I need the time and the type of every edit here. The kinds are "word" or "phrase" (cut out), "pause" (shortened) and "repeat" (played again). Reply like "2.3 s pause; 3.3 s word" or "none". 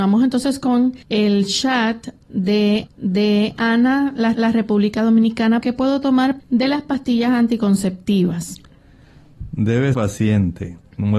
1.0 s pause; 2.9 s repeat; 4.3 s repeat; 5.6 s word; 6.4 s phrase; 9.9 s word